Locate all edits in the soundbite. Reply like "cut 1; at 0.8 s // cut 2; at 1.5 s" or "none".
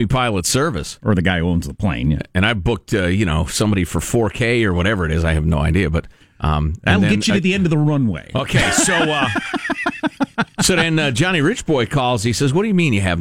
none